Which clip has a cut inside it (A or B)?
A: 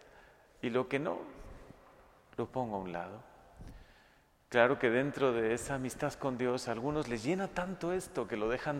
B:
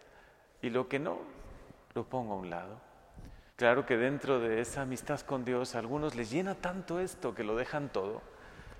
B